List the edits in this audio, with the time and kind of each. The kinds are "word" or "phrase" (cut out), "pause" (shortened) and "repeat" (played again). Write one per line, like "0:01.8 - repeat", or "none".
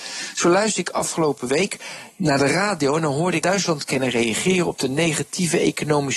0:03.4 - word